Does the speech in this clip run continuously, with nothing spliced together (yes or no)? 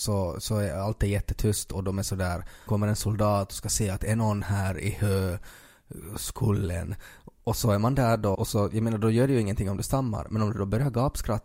no